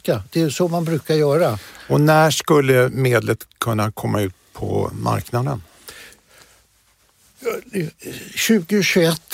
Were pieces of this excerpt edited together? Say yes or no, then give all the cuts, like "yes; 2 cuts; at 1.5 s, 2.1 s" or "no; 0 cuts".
no; 0 cuts